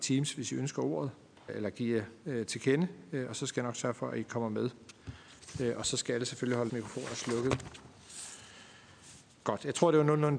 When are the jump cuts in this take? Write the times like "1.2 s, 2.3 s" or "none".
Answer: 1.5 s, 2.2 s, 6.7 s